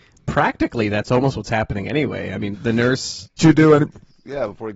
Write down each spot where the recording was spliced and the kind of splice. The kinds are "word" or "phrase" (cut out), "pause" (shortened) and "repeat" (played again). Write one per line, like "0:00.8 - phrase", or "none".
0:02.5 - word
0:03.4 - phrase